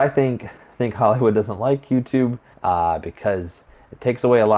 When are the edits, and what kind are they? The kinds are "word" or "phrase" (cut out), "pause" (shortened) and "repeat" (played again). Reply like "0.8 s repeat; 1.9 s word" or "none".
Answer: 2.5 s pause